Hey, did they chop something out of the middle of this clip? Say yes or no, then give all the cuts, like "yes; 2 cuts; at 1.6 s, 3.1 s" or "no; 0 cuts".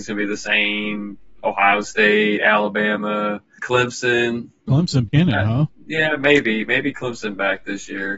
yes; 3 cuts; at 3.6 s, 4.7 s, 5.1 s